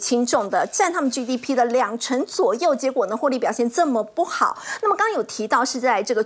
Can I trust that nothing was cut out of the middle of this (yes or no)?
yes